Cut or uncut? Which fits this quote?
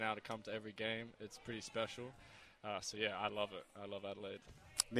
uncut